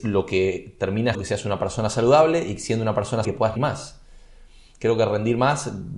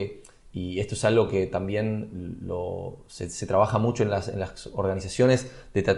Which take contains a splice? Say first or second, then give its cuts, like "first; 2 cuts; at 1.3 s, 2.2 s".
first; 3 cuts; at 1.1 s, 3.2 s, 3.6 s